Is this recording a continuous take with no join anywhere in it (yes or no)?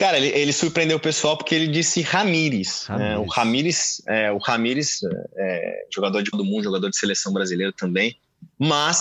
no